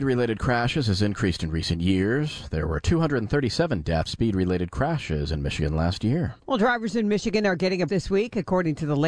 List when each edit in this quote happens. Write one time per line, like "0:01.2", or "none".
0:04.1
0:06.4
0:07.9